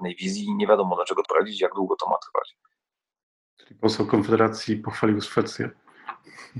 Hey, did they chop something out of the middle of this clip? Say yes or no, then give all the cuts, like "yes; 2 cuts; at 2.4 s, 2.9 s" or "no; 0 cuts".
yes; 1 cut; at 1.2 s